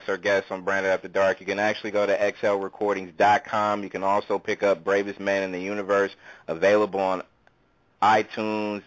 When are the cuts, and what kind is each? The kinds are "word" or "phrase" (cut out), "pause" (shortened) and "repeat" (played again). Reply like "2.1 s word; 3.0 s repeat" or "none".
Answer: none